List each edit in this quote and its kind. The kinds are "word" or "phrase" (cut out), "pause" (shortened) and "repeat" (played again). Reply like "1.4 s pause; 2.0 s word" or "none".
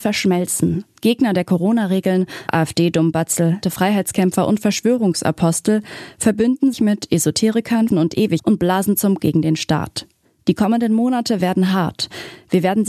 2.5 s word; 3.6 s word; 6.7 s word; 7.9 s word; 8.4 s word; 9.2 s word